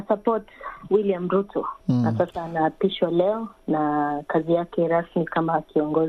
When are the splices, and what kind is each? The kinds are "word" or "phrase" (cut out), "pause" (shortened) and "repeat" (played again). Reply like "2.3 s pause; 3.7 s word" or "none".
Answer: 1.8 s pause

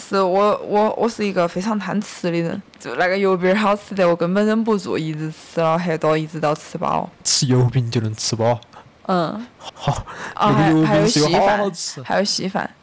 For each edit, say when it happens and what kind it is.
9.7 s repeat

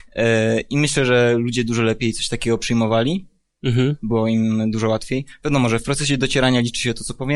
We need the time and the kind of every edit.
none

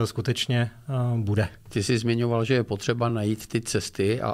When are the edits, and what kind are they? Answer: none

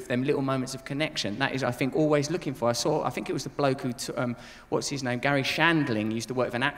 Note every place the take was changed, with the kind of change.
1.9 s phrase

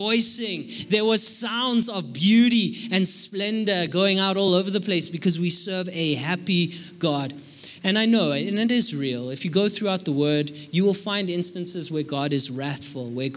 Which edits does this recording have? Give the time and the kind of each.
none

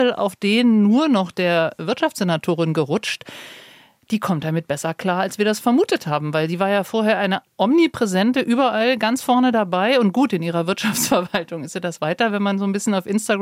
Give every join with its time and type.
none

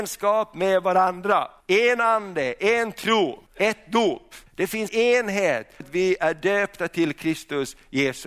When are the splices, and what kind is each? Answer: 1.6 s pause; 3.5 s pause; 4.5 s pause; 4.9 s word; 5.8 s word

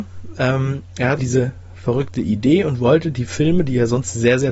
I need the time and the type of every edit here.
1.2 s word

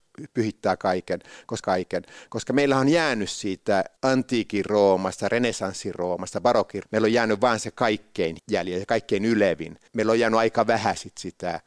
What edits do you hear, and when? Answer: 1.6 s repeat; 4.0 s pause; 6.8 s word; 8.4 s word; 9.9 s pause

